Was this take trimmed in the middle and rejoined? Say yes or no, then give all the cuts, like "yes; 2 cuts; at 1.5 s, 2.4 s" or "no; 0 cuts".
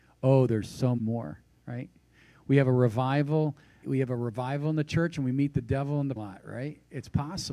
yes; 3 cuts; at 1.0 s, 3.8 s, 6.2 s